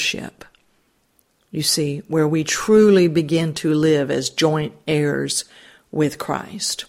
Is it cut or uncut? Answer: uncut